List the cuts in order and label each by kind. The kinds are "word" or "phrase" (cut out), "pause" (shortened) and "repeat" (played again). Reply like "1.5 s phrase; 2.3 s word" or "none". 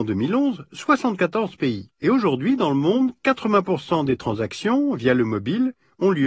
1.9 s pause